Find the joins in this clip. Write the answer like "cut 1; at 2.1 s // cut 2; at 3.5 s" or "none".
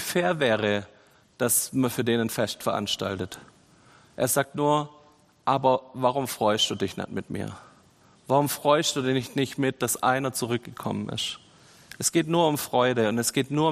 none